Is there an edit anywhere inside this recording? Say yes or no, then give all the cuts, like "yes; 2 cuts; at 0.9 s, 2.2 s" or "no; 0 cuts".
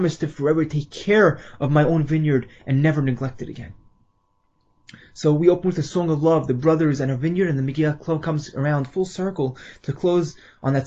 no; 0 cuts